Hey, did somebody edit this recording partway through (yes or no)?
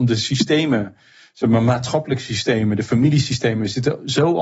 no